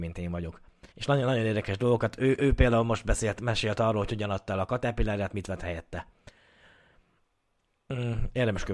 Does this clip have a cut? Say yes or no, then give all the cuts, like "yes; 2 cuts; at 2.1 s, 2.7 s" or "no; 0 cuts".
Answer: yes; 1 cut; at 0.9 s